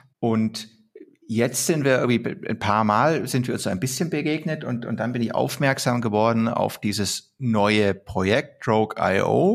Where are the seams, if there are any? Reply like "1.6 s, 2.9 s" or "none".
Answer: none